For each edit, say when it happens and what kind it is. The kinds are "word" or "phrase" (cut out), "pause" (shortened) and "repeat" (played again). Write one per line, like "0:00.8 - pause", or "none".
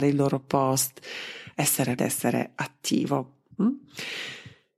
0:02.0 - word
0:03.5 - pause